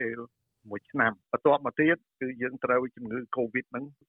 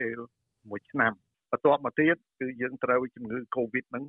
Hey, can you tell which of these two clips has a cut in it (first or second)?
first